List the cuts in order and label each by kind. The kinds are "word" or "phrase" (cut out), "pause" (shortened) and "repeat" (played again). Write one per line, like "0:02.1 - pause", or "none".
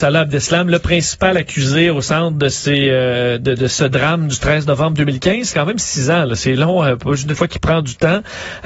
0:05.5 - word
0:07.4 - phrase